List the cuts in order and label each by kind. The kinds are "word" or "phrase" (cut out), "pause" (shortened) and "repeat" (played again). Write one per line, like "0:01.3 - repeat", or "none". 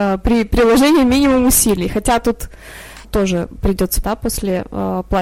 0:03.0 - word
0:04.0 - word

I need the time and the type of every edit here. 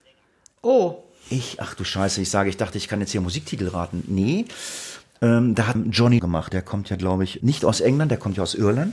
0:05.8 - word
0:06.2 - word
0:06.5 - word
0:07.4 - word

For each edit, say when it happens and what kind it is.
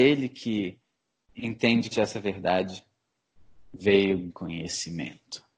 0:01.9 - word
0:04.3 - word

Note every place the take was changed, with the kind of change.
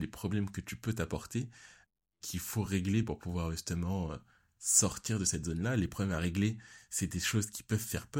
none

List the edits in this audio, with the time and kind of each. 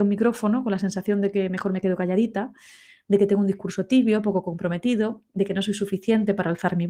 none

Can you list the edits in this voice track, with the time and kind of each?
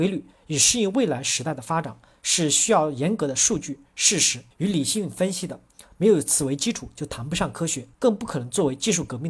0:04.5 - pause
0:07.9 - pause

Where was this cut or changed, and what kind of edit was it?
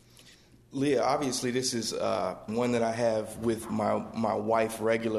0:02.5 - phrase

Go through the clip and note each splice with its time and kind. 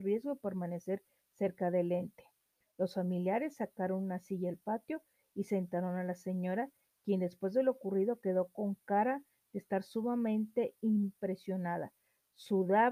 none

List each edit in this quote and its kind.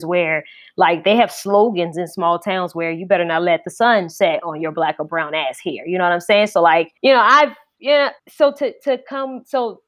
0:07.0 - pause
0:08.2 - pause

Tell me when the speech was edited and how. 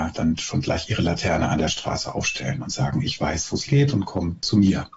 0:03.7 - word

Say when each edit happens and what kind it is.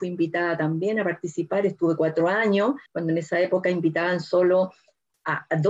0:02.9 - pause

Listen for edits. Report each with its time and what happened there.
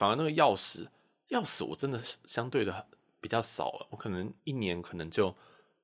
0:04.4 - pause

